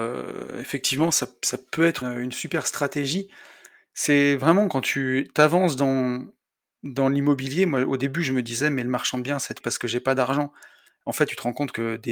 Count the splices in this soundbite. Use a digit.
2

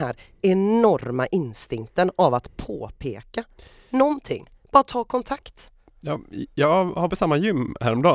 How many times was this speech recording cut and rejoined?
1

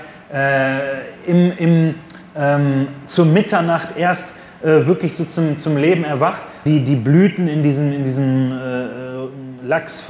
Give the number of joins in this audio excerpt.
1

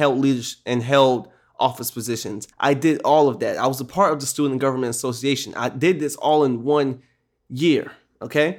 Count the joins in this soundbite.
1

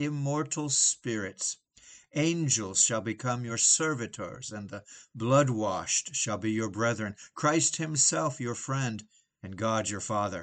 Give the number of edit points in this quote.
0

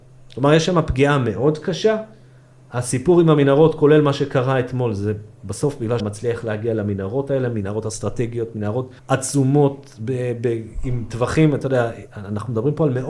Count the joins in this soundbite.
2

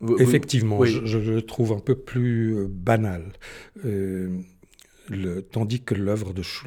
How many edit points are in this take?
0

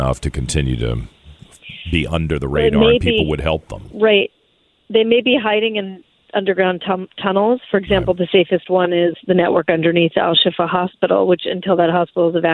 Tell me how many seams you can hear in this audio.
0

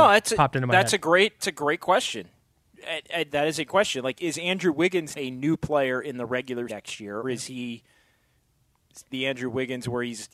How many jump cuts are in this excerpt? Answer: 8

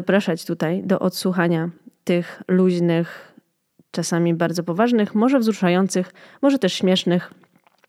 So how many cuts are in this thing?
0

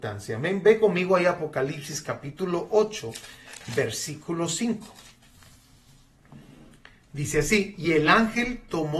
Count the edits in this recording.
0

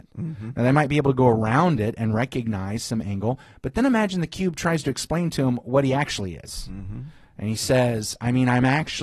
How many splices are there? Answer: 0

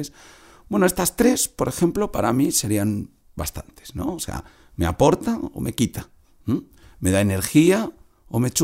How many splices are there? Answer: 0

